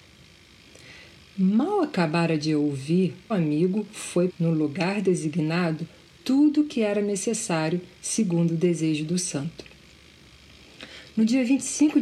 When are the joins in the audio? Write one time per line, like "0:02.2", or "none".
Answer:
0:03.3
0:04.3